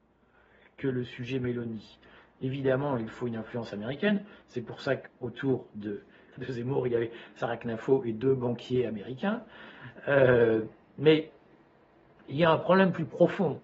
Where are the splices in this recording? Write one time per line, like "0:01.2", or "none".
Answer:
0:06.3